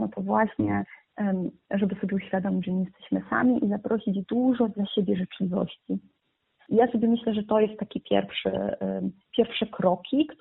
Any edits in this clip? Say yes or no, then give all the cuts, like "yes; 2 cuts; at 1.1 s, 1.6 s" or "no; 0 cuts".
no; 0 cuts